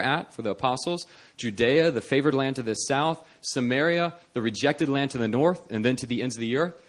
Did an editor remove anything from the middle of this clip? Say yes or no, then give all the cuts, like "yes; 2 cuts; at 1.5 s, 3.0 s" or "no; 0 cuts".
no; 0 cuts